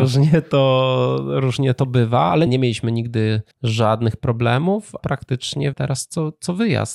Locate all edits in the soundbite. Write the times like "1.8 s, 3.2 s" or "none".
2.5 s, 3.5 s, 5.0 s, 5.7 s